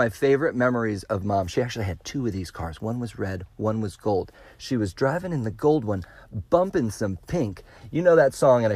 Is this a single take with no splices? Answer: yes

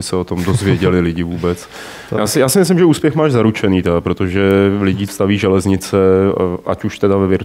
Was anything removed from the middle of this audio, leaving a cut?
yes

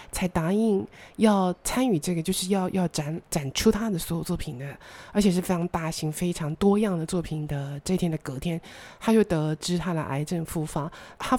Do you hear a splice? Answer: yes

